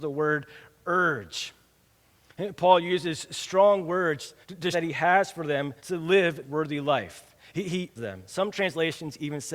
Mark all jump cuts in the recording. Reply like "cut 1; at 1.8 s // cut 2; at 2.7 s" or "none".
cut 1; at 4.4 s // cut 2; at 4.7 s // cut 3; at 5.8 s // cut 4; at 6.4 s // cut 5; at 8.0 s

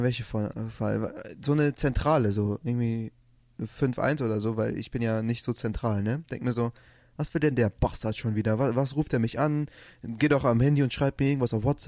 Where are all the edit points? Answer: none

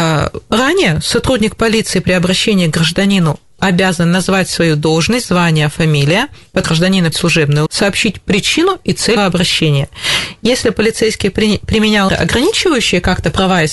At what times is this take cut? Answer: cut 1; at 3.6 s // cut 2; at 6.6 s // cut 3; at 7.1 s // cut 4; at 7.7 s // cut 5; at 9.2 s // cut 6; at 12.1 s

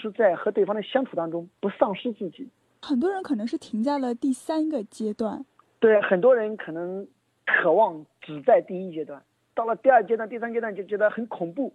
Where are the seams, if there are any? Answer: none

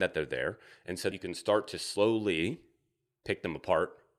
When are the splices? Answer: cut 1; at 1.1 s

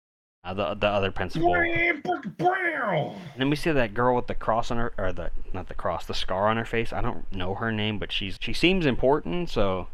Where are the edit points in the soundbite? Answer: cut 1; at 8.4 s

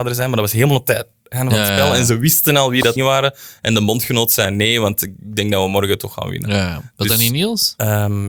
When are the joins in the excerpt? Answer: cut 1; at 3.0 s

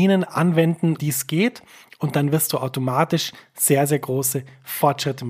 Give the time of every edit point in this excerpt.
cut 1; at 1.0 s

